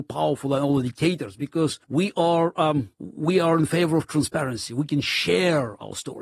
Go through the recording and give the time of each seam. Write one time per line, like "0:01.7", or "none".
0:01.8
0:02.9